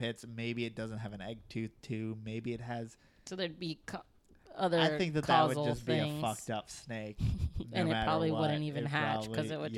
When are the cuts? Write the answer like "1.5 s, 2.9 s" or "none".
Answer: none